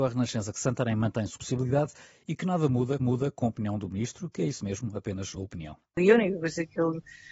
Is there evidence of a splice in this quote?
yes; 3 cuts; at 1.4 s, 3.0 s, 5.4 s

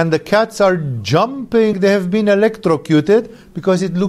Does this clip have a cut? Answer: yes; 1 cut; at 1.7 s

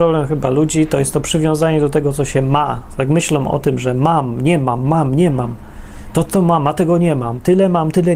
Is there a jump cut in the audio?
no; 0 cuts

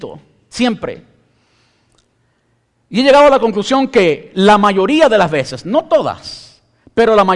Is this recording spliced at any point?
no; 0 cuts

